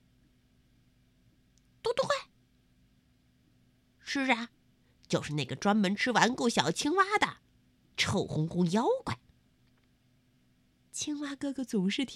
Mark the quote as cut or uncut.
uncut